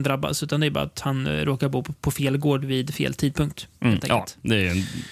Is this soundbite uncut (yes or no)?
yes